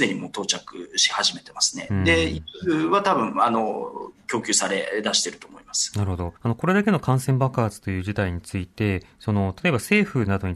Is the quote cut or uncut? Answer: cut